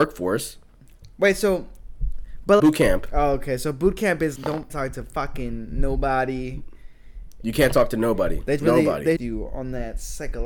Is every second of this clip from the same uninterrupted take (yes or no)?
no